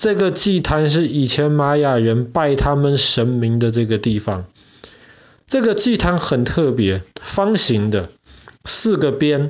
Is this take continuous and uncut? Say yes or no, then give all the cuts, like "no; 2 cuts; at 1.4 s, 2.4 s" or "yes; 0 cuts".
yes; 0 cuts